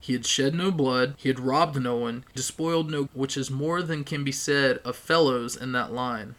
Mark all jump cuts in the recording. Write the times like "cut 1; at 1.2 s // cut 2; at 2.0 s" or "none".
cut 1; at 2.4 s // cut 2; at 3.1 s